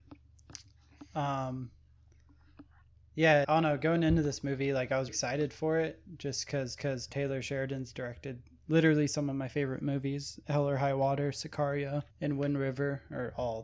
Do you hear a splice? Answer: yes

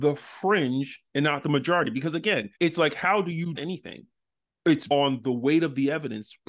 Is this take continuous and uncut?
no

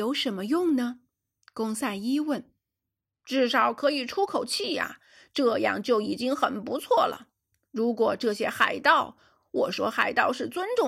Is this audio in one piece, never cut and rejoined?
yes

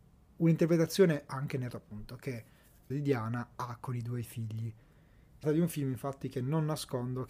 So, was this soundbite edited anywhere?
yes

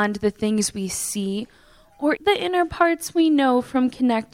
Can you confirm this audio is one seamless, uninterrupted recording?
no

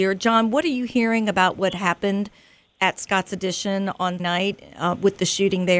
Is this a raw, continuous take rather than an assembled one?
no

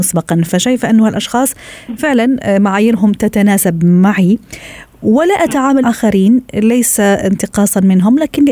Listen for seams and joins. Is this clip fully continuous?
no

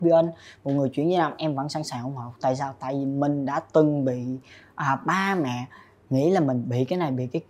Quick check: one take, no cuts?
yes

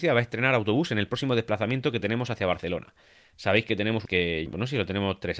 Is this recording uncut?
no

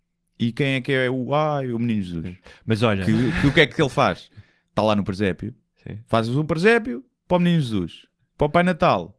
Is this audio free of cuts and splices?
yes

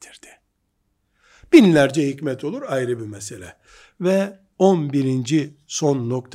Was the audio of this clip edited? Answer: no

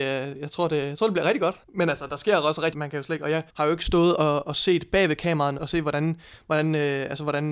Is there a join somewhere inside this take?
yes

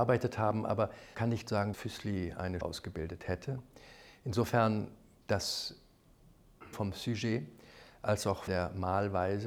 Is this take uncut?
no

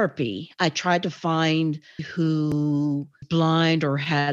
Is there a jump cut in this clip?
yes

